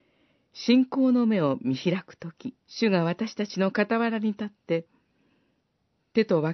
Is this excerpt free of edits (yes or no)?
no